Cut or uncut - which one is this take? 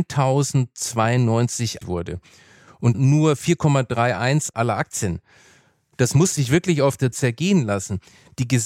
cut